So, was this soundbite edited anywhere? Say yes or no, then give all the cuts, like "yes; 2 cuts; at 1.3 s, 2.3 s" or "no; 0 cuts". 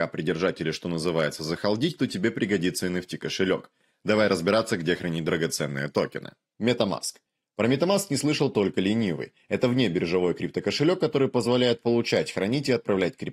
no; 0 cuts